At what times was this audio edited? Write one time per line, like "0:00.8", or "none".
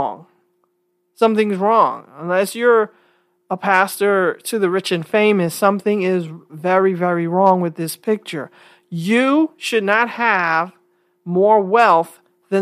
none

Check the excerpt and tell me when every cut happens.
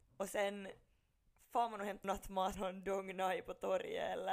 0:02.0
0:02.5

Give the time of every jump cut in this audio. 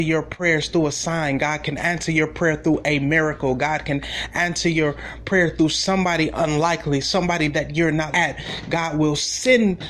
0:08.1

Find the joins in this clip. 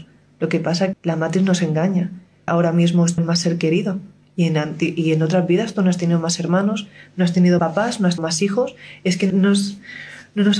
0:00.9
0:02.5
0:03.2
0:07.6
0:08.2
0:09.3

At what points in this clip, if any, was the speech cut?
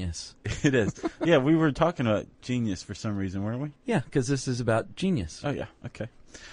0:03.8

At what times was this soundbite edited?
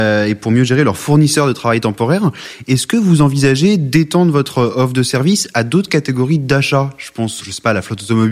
0:07.4

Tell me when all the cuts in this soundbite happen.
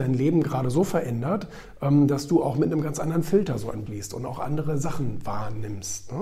0:03.9

